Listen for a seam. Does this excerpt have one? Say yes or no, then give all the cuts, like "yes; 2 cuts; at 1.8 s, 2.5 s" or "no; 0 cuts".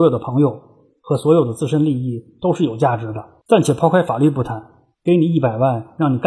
yes; 2 cuts; at 3.4 s, 4.9 s